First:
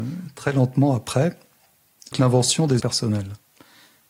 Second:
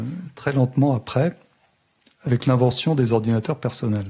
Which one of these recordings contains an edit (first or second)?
first